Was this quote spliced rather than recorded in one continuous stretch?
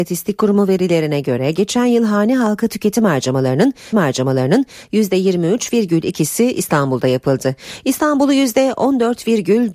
yes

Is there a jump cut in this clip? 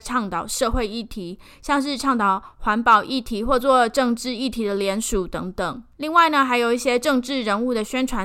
yes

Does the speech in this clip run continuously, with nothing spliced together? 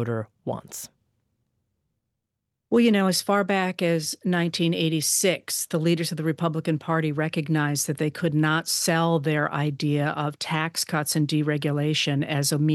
yes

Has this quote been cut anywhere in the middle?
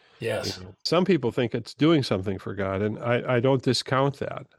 no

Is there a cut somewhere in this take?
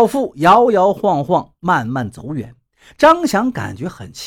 no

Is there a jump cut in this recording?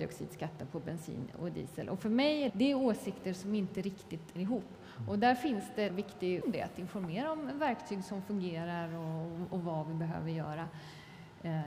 yes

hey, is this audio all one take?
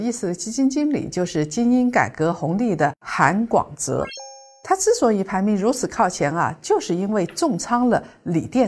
yes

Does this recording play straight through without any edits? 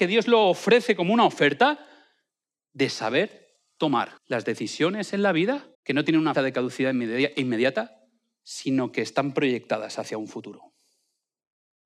no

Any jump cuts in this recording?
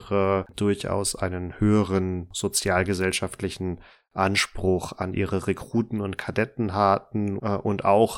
no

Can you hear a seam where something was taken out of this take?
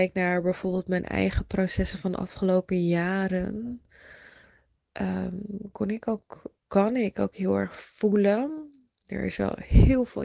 no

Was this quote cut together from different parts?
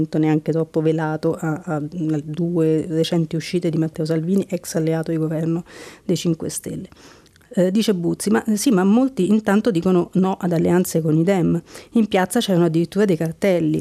no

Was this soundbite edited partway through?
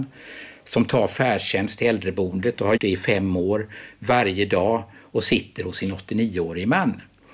yes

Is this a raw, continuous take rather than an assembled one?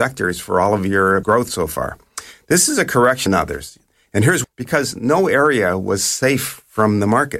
no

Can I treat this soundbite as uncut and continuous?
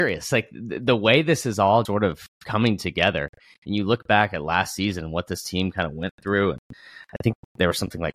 no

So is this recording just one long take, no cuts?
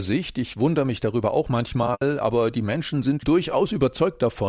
no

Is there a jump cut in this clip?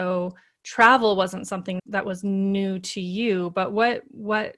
yes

